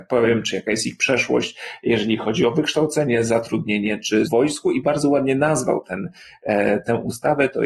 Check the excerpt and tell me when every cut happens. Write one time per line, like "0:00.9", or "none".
0:04.3